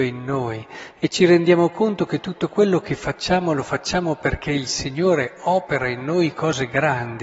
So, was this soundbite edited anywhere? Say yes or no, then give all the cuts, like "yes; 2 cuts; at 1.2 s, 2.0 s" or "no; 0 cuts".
no; 0 cuts